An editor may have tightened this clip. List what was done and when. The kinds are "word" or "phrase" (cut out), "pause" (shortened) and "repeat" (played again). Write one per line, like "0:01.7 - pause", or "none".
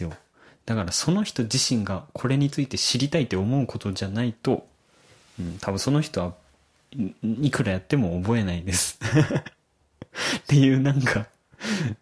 none